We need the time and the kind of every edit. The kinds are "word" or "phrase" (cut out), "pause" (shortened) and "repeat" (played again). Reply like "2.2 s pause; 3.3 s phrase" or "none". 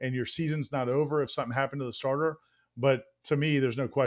none